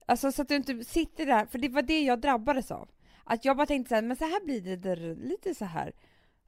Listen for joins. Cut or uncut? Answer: uncut